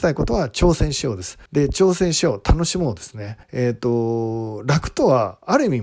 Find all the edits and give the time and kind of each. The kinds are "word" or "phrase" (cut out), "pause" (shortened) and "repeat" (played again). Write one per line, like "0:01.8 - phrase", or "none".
0:01.5 - pause
0:03.4 - pause